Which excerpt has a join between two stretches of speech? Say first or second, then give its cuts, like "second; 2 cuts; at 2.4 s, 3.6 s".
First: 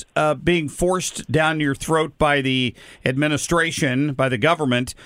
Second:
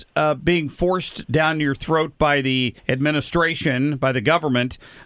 second; 1 cut; at 2.8 s